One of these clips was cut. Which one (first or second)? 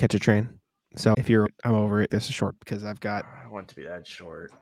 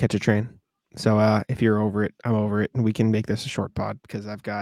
first